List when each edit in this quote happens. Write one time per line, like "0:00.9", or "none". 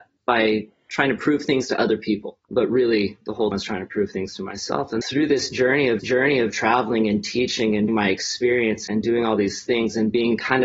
0:02.4
0:03.5
0:05.0
0:06.0
0:07.9
0:08.9